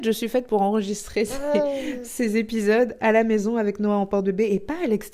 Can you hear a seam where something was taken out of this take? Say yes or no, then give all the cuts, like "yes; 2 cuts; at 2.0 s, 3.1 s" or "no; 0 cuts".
no; 0 cuts